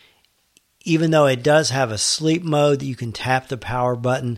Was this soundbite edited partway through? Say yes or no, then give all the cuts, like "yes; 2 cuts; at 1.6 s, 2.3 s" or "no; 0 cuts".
no; 0 cuts